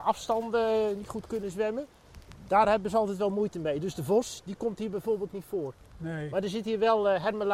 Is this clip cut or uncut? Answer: uncut